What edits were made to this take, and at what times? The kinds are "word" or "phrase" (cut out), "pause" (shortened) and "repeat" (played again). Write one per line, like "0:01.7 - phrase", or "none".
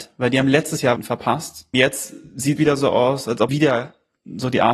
0:01.0 - word
0:01.7 - word
0:02.6 - word
0:03.5 - word